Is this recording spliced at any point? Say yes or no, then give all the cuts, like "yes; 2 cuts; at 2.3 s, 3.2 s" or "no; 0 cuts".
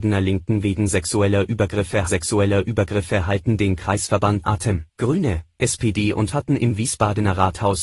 yes; 4 cuts; at 2.1 s, 4.4 s, 4.9 s, 6.3 s